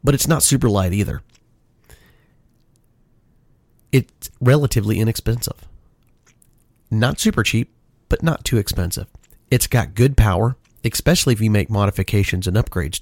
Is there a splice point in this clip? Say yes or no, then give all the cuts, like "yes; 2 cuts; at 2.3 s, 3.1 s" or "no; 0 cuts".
no; 0 cuts